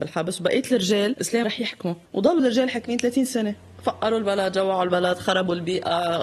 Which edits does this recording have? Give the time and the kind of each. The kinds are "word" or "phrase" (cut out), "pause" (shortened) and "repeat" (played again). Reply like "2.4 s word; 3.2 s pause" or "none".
1.4 s word; 2.4 s word